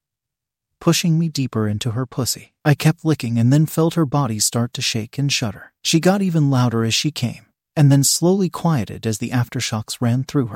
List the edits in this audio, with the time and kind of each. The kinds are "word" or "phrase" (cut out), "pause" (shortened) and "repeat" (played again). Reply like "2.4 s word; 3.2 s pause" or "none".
none